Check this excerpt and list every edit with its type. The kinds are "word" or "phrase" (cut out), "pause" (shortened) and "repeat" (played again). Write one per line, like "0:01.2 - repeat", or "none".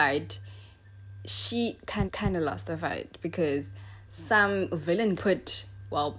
0:02.0 - repeat
0:04.0 - pause
0:05.2 - word